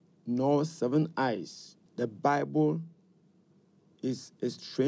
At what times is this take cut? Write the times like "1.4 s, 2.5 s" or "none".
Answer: 1.9 s